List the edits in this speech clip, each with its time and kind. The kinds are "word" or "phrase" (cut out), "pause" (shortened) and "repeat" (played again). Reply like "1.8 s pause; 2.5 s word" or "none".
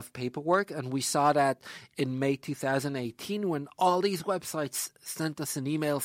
none